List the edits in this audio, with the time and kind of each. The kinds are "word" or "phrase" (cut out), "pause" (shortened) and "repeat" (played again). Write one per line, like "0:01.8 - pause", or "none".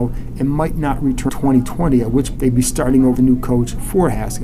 0:01.3 - word
0:02.4 - word
0:03.1 - word

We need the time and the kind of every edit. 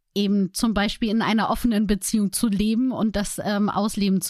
none

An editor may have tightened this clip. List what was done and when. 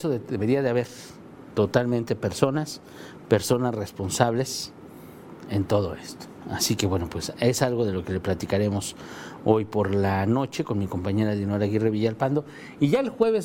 none

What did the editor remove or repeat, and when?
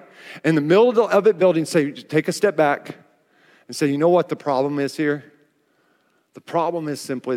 none

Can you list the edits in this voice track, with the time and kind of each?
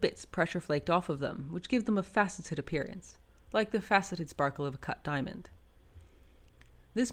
none

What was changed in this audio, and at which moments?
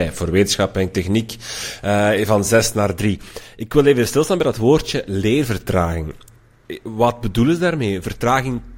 none

